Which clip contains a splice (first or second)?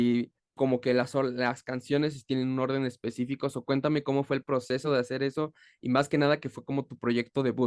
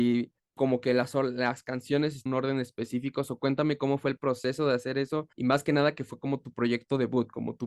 second